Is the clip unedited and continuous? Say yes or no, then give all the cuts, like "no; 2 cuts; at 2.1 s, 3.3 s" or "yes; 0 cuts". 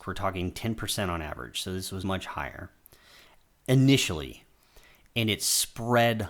no; 1 cut; at 2.0 s